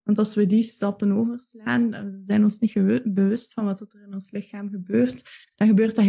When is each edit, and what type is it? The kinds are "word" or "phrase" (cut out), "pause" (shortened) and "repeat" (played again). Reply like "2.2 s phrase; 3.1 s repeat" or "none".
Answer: none